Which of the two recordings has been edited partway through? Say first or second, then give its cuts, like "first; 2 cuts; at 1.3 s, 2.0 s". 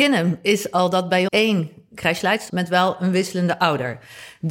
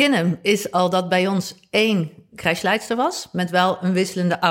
first; 2 cuts; at 1.3 s, 2.5 s